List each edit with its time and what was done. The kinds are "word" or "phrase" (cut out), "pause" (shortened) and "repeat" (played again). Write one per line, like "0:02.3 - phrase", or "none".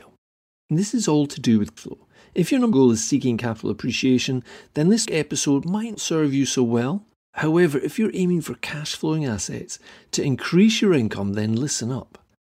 0:01.8 - word
0:02.7 - word
0:05.0 - word
0:05.9 - word